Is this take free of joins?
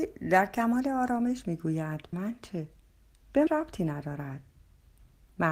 no; 2 cuts; at 2.1 s, 3.5 s

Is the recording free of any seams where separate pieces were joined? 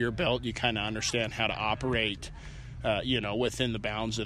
yes; 0 cuts

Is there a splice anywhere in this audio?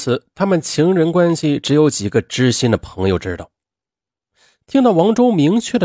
no; 0 cuts

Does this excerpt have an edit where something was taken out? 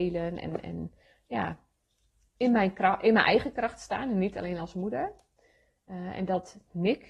no; 0 cuts

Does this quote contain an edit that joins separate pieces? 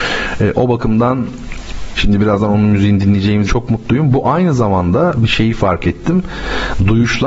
yes; 2 cuts; at 2.0 s, 3.4 s

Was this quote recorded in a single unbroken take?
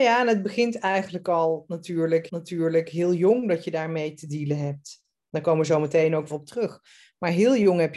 no; 2 cuts; at 2.3 s, 6.3 s

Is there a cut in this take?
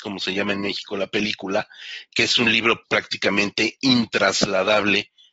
yes; 1 cut; at 2.8 s

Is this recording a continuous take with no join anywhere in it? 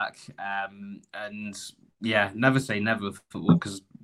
yes; 0 cuts

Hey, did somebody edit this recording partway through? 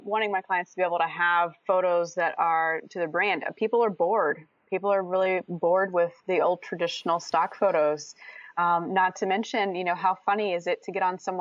yes; 1 cut; at 1.6 s

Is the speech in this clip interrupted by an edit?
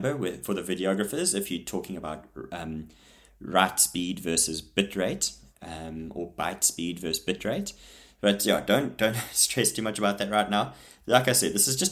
no; 0 cuts

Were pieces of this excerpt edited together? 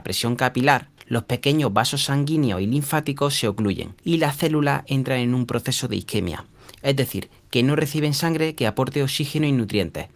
yes; 2 cuts; at 1.0 s, 4.0 s

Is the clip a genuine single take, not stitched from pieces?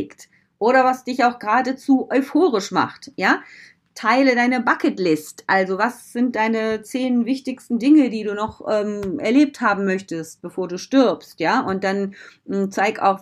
yes; 0 cuts

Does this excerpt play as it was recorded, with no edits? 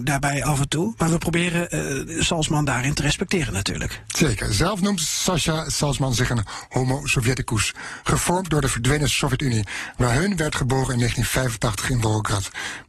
yes; 0 cuts

